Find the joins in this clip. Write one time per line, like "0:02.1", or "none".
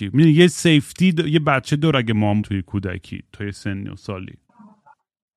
0:02.4